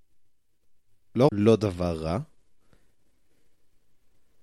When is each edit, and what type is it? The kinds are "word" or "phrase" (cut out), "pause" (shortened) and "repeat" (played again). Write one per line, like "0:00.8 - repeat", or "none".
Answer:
0:01.3 - word